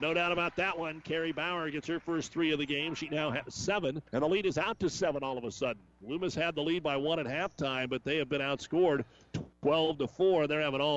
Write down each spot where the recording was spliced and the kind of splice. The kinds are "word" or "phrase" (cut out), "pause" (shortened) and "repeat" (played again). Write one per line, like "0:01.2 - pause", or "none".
0:04.1 - pause